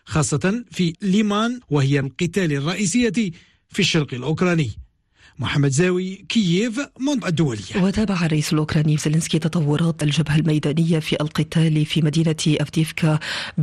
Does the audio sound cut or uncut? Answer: cut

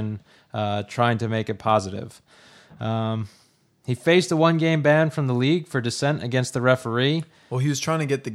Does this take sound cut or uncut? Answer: uncut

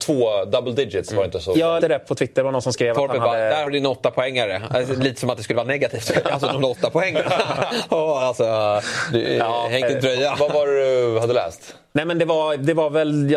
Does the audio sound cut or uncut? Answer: cut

